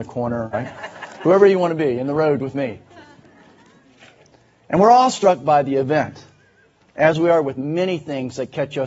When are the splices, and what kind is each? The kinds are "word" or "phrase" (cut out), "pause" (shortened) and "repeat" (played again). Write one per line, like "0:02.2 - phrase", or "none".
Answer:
none